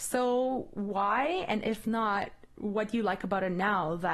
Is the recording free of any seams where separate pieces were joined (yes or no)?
yes